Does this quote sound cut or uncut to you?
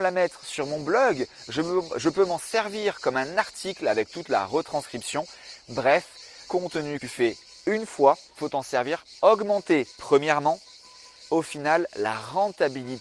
cut